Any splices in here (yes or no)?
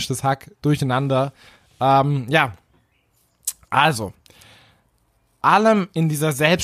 yes